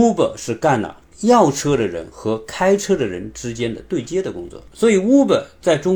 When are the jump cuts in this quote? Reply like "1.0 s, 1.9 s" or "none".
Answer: 4.7 s